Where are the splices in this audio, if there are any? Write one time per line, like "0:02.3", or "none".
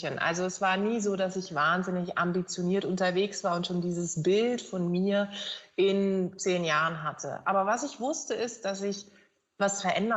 none

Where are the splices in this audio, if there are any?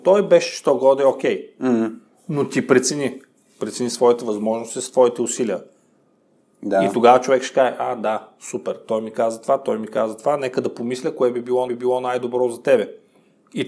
0:11.7

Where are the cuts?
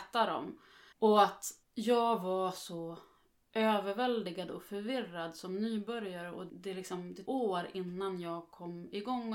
0:00.9
0:01.6
0:06.5
0:07.3

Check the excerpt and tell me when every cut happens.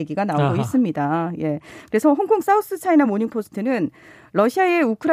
none

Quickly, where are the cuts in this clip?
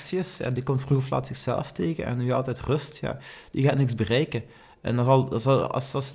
none

